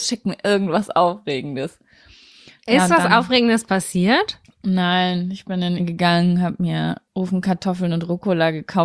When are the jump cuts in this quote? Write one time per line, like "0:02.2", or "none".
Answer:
0:04.4
0:05.8
0:07.1